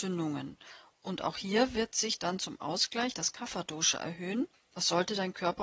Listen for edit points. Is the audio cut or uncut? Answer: cut